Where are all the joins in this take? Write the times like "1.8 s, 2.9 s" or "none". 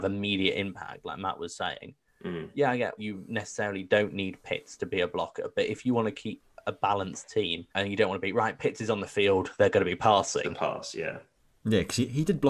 3.0 s, 7.7 s

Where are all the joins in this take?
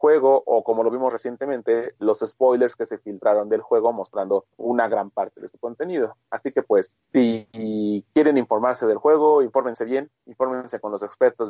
4.5 s, 7.0 s

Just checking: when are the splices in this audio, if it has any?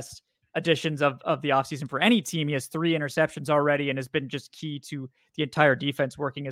none

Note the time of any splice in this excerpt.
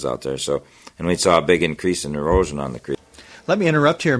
none

